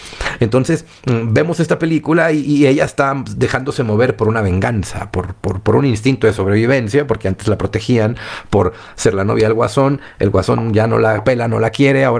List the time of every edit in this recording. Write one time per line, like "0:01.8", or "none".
none